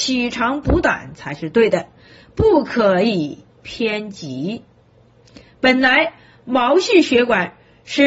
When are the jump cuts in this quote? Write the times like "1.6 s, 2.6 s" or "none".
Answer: none